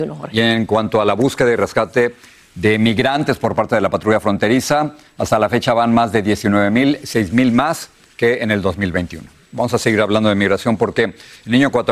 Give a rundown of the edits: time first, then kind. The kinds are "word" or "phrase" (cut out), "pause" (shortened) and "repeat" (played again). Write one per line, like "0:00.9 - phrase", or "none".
none